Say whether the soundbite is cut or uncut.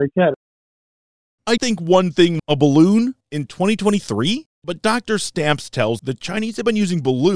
cut